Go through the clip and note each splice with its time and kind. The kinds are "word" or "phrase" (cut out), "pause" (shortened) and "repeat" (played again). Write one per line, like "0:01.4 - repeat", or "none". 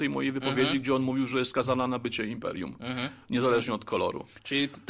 none